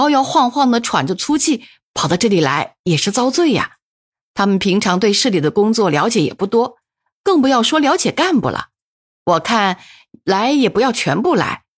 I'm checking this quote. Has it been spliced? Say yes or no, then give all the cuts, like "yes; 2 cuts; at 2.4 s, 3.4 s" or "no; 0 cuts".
no; 0 cuts